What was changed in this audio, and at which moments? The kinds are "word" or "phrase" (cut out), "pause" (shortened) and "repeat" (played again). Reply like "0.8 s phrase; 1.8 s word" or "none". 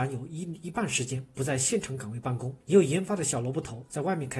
2.6 s pause